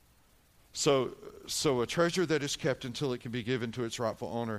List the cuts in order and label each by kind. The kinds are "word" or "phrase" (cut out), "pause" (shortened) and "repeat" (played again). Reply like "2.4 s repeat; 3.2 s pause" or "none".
none